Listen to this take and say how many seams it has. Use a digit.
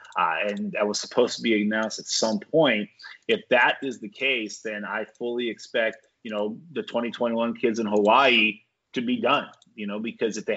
0